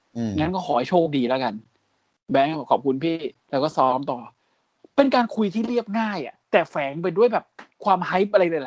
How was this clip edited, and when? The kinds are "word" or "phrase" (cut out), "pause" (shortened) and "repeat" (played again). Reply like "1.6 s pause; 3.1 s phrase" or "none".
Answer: 3.4 s pause; 6.4 s pause; 7.7 s pause